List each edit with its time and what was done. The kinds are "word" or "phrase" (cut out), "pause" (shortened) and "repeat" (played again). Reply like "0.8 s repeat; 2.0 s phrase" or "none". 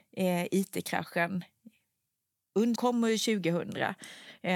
2.8 s word